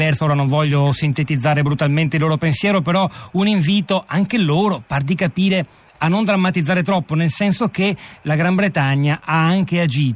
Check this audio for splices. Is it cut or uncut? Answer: uncut